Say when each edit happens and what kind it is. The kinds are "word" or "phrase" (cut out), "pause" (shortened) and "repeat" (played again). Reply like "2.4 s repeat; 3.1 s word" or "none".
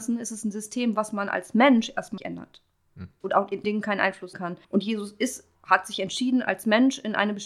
2.2 s word; 3.6 s word; 4.3 s word; 4.6 s pause; 5.5 s pause